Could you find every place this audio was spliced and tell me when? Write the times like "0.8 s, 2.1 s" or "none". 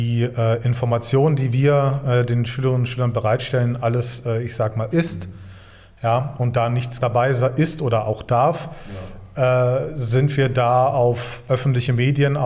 4.9 s, 7.0 s

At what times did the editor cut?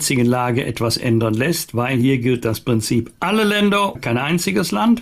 4.0 s

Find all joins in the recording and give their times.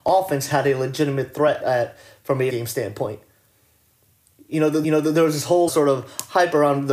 1.6 s, 2.5 s, 4.8 s, 5.7 s

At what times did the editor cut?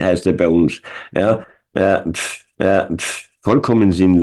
2.5 s

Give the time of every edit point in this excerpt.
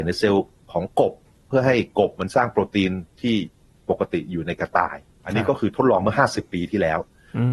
none

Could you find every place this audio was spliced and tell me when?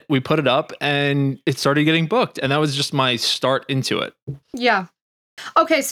4.4 s

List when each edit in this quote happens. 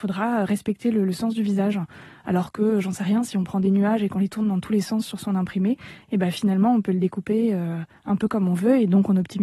none

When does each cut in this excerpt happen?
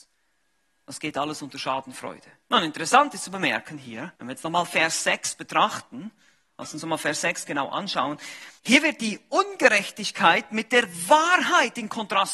2.4 s, 4.2 s, 8.6 s

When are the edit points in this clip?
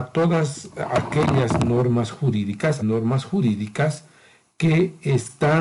2.8 s

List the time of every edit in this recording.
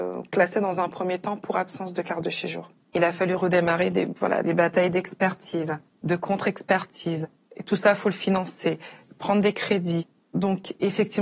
4.4 s

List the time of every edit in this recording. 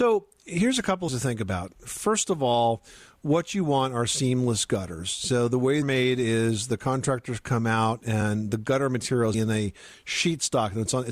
1.1 s, 5.8 s, 9.3 s

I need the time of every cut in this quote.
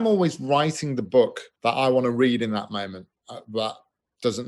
1.5 s

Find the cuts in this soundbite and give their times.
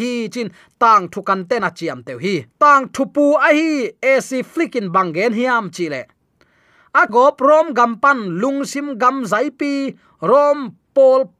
1.6 s, 2.5 s, 7.1 s

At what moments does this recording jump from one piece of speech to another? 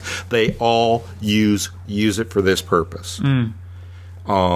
1.9 s

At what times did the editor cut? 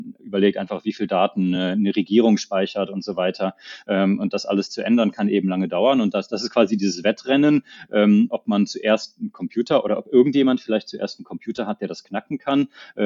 none

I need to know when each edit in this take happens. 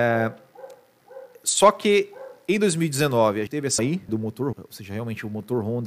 3.5 s, 3.8 s, 4.1 s, 4.5 s

